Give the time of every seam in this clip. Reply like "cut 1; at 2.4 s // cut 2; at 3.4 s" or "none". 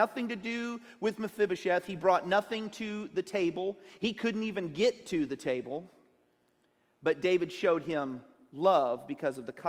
none